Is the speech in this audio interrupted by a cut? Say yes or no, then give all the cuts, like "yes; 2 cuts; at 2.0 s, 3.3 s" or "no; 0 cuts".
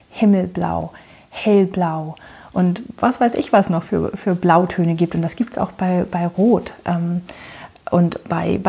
no; 0 cuts